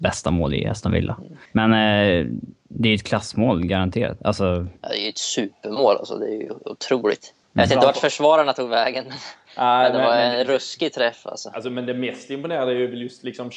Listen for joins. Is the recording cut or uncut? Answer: cut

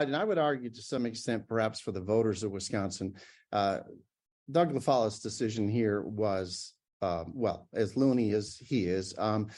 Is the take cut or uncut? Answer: uncut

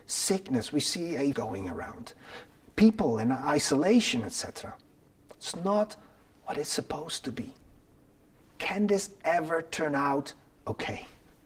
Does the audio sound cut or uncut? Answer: cut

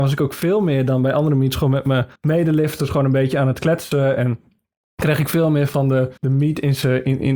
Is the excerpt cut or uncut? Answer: cut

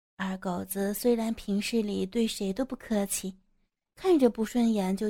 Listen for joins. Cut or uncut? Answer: uncut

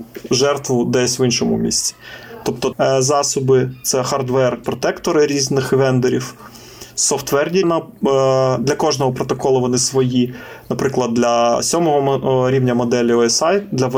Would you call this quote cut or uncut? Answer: cut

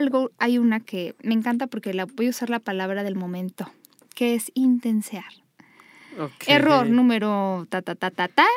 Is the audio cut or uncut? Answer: uncut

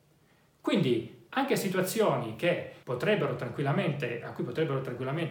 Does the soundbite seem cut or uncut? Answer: cut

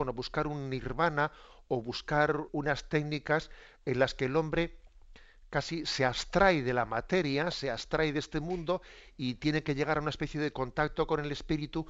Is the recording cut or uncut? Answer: cut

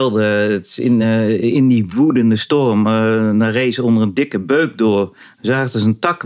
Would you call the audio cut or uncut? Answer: uncut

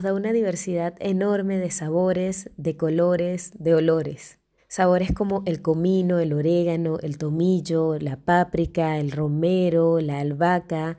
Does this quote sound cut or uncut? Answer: cut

